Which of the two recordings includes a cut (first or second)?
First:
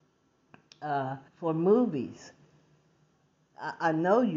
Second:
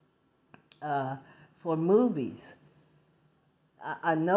first